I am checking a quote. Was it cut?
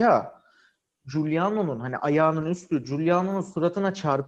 no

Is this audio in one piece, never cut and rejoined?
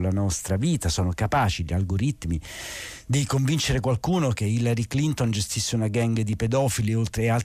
yes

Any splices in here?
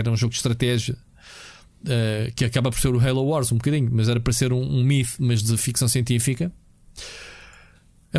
no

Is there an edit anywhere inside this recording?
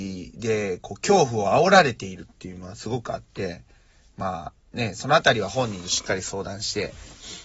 no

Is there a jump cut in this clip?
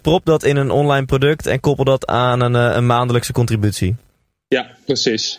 no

